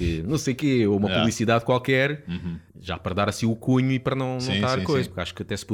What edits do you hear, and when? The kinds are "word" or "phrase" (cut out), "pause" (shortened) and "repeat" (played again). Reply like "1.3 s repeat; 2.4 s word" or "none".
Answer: 2.7 s pause